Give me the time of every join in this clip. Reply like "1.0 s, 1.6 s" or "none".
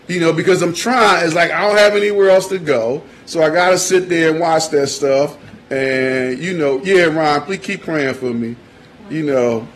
none